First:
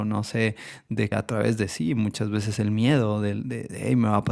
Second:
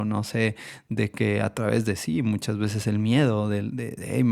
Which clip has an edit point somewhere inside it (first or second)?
first